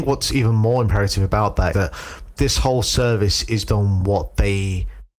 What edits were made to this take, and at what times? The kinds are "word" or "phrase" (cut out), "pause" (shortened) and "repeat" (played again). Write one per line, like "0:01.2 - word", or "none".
0:01.7 - word
0:02.4 - word
0:03.7 - word

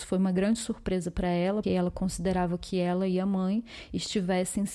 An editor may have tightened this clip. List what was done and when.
0:01.6 - word

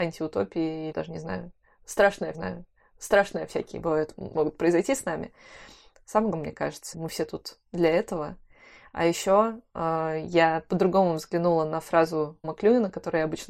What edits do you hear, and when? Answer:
0:00.9 - phrase
0:02.3 - repeat
0:04.3 - phrase
0:06.3 - phrase
0:06.9 - word
0:12.4 - word

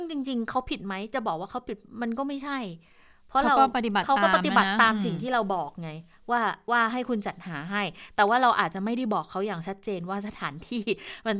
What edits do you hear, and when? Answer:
none

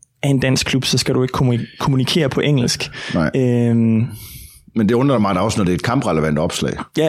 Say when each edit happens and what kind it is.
none

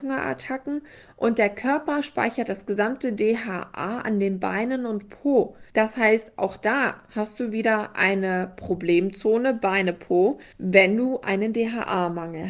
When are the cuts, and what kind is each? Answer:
0:05.7 - pause
0:10.5 - pause

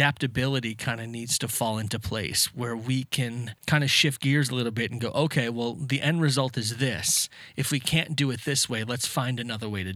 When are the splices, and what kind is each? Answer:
0:03.6 - pause

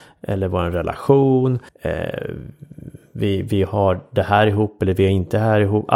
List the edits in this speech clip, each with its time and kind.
0:01.7 - pause

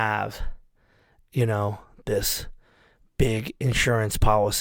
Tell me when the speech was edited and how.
none

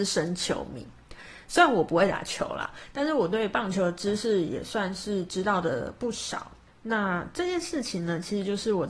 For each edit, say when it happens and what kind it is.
0:06.7 - pause

